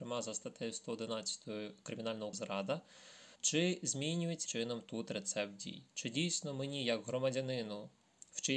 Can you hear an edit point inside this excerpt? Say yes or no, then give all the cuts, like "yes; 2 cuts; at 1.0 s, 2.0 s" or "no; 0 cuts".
yes; 3 cuts; at 2.3 s, 3.3 s, 4.5 s